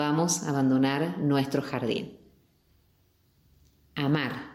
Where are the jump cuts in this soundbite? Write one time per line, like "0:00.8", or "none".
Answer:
none

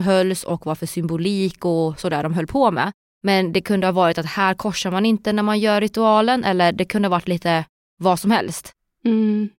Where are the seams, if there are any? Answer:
0:03.1

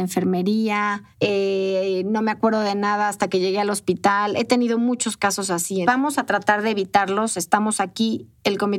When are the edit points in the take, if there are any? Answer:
0:01.1
0:05.8

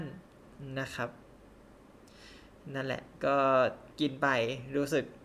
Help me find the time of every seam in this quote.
0:03.9

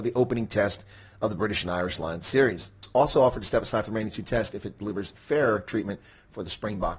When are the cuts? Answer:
none

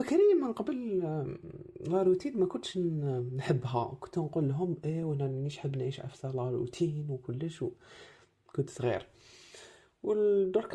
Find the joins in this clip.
none

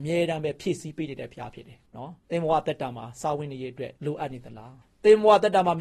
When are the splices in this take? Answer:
0:01.9
0:02.2
0:04.0
0:04.8

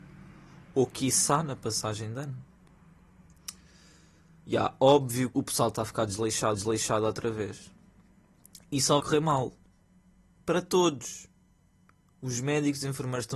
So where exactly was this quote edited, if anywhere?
0:05.3
0:06.5
0:09.0

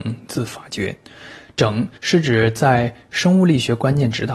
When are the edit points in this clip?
0:02.0

